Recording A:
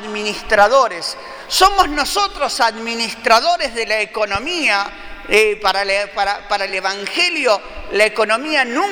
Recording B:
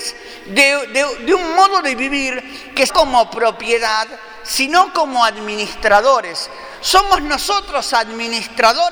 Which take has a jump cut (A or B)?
B